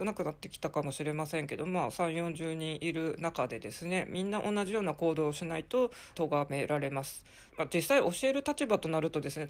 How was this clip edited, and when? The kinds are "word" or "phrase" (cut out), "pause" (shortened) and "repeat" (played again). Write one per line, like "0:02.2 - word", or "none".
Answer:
0:06.1 - phrase
0:07.5 - pause